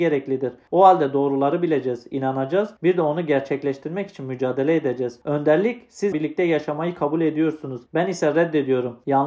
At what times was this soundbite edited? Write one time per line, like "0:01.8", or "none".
0:02.8
0:06.1
0:07.9